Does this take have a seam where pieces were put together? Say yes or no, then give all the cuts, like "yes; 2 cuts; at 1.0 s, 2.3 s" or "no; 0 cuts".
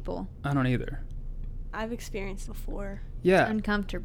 yes; 2 cuts; at 1.7 s, 2.5 s